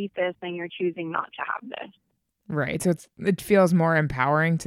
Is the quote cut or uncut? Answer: uncut